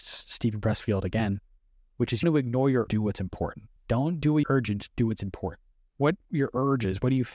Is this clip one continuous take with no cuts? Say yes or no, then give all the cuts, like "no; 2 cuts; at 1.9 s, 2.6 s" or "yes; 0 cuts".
no; 4 cuts; at 2.2 s, 2.9 s, 3.8 s, 4.4 s